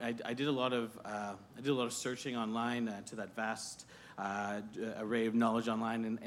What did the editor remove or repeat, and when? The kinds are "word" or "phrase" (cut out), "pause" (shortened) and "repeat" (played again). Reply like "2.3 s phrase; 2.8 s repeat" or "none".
none